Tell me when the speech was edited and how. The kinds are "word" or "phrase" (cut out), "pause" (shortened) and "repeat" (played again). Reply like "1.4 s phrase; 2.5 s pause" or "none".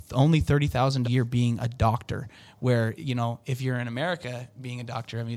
1.0 s word; 3.0 s word

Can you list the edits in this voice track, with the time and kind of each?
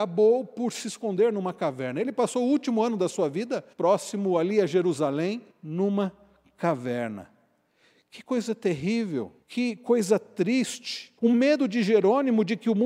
3.7 s pause; 5.5 s pause; 9.4 s pause; 11.2 s pause

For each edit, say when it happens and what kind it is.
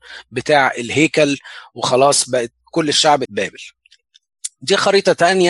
2.6 s pause; 3.2 s phrase

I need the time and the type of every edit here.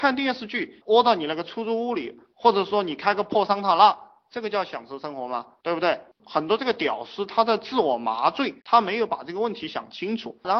8.6 s pause

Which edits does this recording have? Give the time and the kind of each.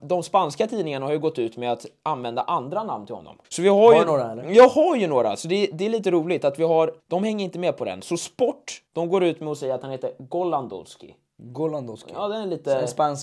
3.4 s pause; 7.0 s pause; 8.9 s pause

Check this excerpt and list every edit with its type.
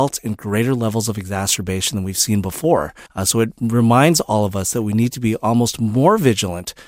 3.1 s pause

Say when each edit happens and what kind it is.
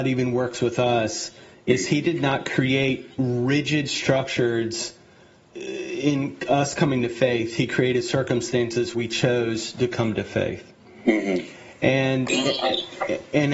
5.5 s word; 8.9 s word

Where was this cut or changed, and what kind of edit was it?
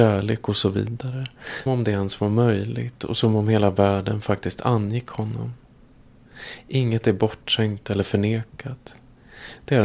1.7 s word

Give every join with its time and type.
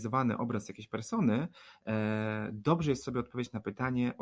none

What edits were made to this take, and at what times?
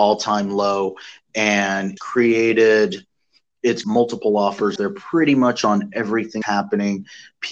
2.0 s word; 3.8 s phrase; 4.8 s word; 6.4 s word

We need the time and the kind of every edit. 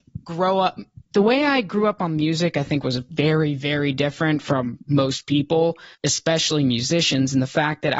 1.0 s pause; 5.9 s pause

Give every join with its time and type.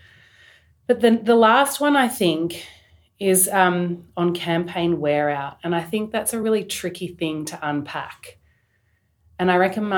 none

